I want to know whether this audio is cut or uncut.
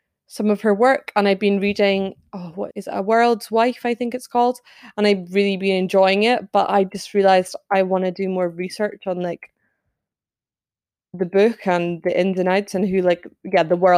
cut